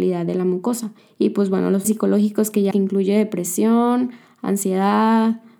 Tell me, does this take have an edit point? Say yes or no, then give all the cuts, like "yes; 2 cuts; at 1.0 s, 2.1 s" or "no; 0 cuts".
yes; 3 cuts; at 1.0 s, 1.8 s, 2.7 s